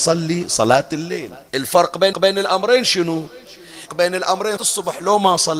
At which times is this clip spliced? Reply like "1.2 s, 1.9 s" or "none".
1.5 s, 2.1 s, 3.9 s, 4.6 s